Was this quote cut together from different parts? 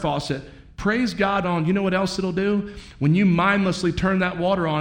yes; 1 cut; at 1.4 s

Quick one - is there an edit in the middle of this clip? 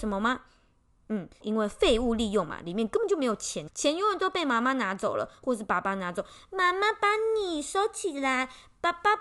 yes; 2 cuts; at 1.4 s, 3.7 s

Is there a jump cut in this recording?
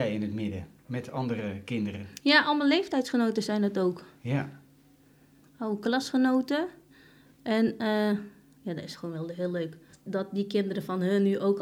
no; 0 cuts

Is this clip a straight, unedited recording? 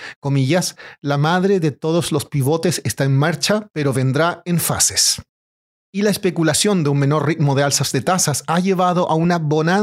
yes; 0 cuts

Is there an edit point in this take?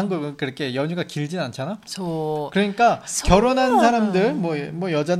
no; 0 cuts

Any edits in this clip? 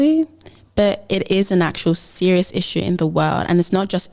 no; 0 cuts

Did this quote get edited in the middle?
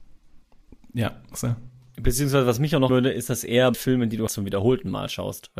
yes; 3 cuts; at 2.9 s, 3.7 s, 4.3 s

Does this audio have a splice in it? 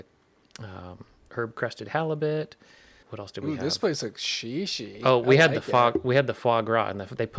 yes; 2 cuts; at 1.3 s, 3.0 s

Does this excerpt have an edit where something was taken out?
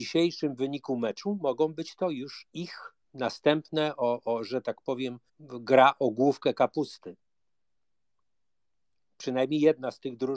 yes; 2 cuts; at 3.0 s, 5.3 s

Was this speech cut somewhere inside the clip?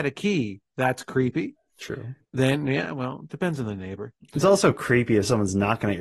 yes; 1 cut; at 2.3 s

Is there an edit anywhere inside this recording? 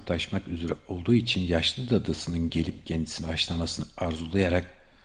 no; 0 cuts

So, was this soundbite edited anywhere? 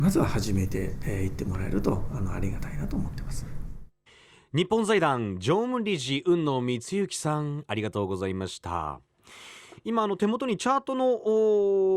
no; 0 cuts

